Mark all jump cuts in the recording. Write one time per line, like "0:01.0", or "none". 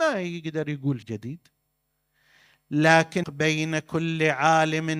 0:01.0
0:03.2